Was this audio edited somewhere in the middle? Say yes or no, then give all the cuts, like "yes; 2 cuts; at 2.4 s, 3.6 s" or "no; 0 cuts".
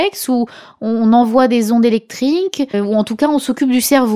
no; 0 cuts